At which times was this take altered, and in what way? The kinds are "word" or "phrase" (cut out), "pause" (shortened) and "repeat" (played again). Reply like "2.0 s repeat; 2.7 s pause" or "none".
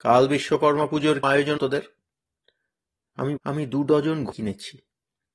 1.2 s word; 1.6 s word; 3.4 s word; 4.3 s word